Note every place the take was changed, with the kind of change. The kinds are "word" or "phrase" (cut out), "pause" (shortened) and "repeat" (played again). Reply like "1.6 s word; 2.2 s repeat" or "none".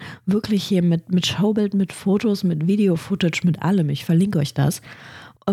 none